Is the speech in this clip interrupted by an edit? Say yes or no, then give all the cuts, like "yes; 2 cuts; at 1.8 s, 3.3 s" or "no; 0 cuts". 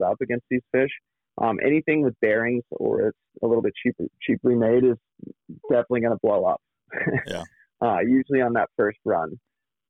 no; 0 cuts